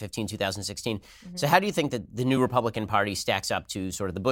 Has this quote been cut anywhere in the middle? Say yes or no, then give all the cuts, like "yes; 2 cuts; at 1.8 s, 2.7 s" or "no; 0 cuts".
no; 0 cuts